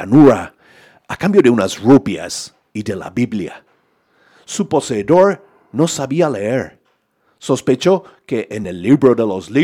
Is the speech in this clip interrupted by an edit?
no; 0 cuts

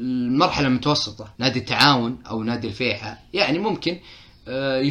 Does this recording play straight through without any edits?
no; 1 cut; at 1.4 s

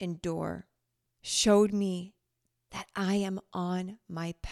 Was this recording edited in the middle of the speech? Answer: no; 0 cuts

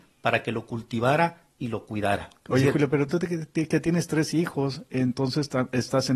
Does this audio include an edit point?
no; 0 cuts

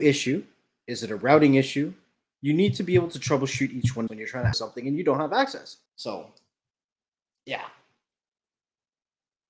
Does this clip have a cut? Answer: yes; 3 cuts; at 4.1 s, 4.5 s, 5.9 s

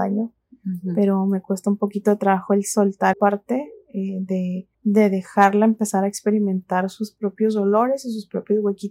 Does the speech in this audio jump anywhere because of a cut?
yes; 2 cuts; at 3.1 s, 4.7 s

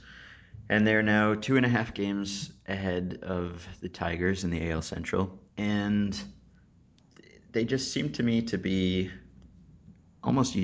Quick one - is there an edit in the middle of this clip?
yes; 1 cut; at 5.5 s

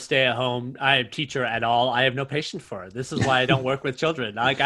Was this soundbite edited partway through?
no; 0 cuts

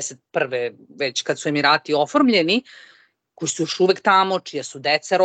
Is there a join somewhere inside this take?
no; 0 cuts

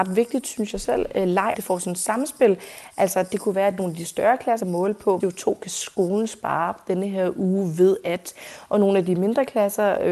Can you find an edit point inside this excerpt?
yes; 3 cuts; at 1.5 s, 4.6 s, 5.2 s

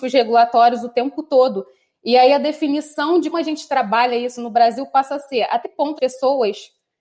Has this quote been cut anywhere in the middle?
yes; 3 cuts; at 3.3 s, 5.6 s, 6.0 s

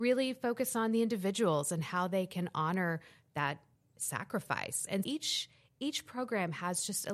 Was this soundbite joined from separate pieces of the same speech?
yes; 2 cuts; at 3.8 s, 5.0 s

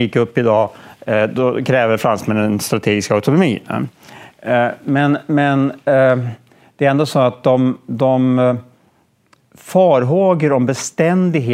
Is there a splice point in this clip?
no; 0 cuts

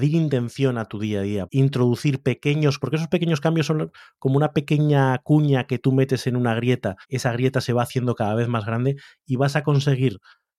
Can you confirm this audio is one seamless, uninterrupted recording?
no; 3 cuts; at 1.4 s, 2.8 s, 7.0 s

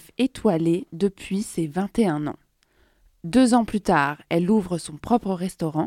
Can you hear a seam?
no; 0 cuts

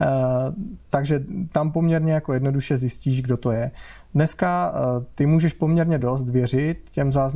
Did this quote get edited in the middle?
no; 0 cuts

